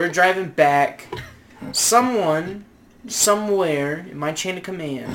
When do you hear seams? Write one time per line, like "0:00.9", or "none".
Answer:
none